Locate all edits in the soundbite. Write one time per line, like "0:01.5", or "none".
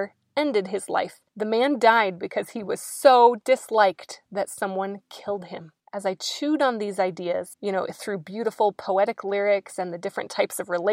0:01.3
0:05.8